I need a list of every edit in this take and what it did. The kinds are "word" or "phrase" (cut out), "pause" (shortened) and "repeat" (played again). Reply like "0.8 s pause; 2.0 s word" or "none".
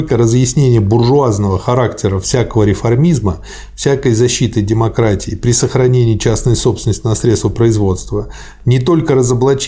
none